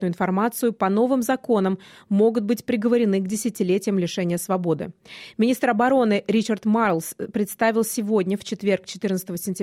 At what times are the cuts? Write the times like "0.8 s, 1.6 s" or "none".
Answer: none